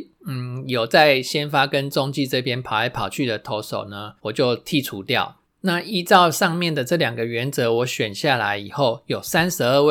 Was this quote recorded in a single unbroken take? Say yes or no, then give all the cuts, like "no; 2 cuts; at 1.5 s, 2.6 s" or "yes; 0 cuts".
no; 2 cuts; at 4.2 s, 5.5 s